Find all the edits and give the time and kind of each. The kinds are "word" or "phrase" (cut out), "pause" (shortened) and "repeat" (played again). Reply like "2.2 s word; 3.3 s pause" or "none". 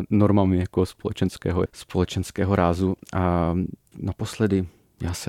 1.7 s word; 3.9 s word